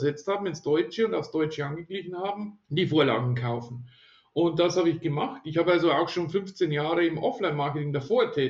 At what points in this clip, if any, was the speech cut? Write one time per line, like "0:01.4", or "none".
0:02.6